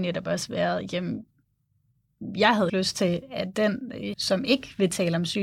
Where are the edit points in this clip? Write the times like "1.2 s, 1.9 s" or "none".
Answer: 2.7 s, 4.1 s